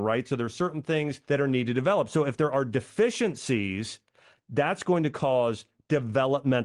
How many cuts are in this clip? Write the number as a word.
one